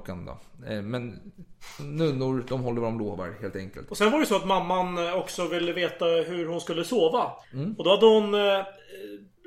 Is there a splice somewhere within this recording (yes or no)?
yes